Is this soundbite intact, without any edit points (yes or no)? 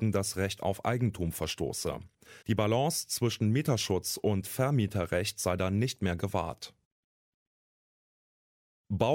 no